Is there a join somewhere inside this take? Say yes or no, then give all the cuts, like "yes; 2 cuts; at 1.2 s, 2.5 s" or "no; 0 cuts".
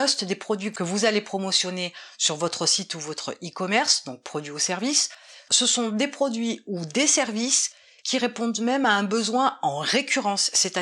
no; 0 cuts